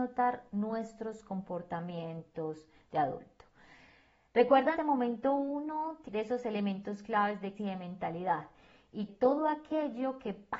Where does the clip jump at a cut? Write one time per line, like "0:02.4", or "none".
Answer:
0:04.8
0:06.1
0:07.6
0:09.1